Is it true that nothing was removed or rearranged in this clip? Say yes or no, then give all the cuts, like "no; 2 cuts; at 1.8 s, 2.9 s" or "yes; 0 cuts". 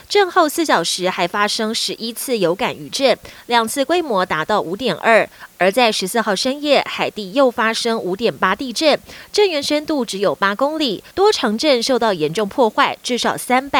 no; 1 cut; at 11.1 s